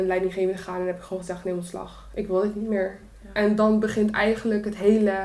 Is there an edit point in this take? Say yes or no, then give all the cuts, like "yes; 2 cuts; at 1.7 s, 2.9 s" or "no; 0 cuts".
no; 0 cuts